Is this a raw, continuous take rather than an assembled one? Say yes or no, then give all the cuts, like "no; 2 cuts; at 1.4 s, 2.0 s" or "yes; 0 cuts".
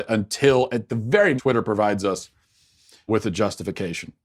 no; 2 cuts; at 1.4 s, 3.1 s